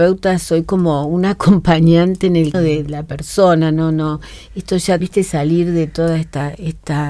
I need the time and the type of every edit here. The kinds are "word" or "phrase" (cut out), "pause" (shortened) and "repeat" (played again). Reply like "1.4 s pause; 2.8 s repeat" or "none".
2.5 s word; 2.9 s word; 5.0 s word